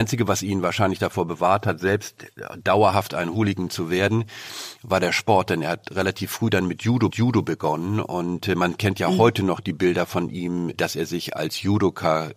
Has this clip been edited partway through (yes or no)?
yes